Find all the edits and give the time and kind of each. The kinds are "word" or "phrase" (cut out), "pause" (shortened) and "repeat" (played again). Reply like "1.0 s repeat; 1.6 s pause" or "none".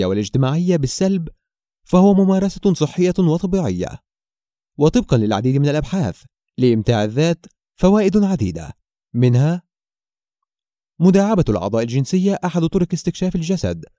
none